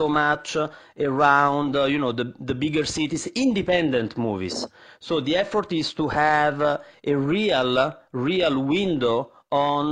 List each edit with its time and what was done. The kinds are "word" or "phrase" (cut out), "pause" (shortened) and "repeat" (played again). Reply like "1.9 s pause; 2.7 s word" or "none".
none